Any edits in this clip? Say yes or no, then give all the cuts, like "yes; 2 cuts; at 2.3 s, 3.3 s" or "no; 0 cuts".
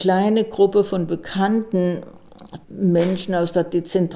yes; 1 cut; at 2.6 s